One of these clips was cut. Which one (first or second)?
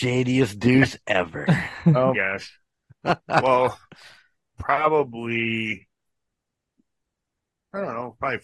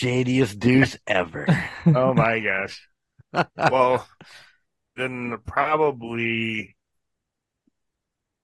first